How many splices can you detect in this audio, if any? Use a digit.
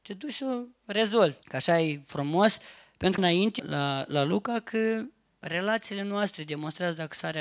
3